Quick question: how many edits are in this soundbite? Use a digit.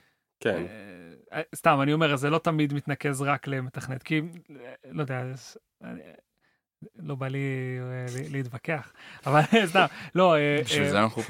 1